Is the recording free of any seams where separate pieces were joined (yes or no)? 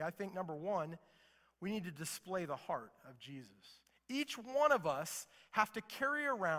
yes